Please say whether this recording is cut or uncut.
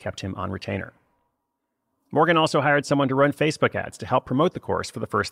uncut